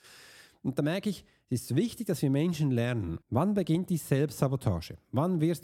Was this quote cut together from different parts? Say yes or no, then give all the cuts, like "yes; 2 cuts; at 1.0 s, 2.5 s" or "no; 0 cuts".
yes; 1 cut; at 3.2 s